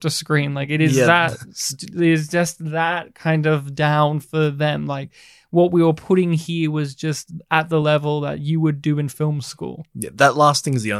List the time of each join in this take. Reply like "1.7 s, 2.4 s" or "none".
none